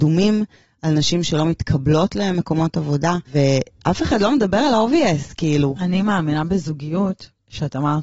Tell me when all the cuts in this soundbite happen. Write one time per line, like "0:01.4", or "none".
0:03.3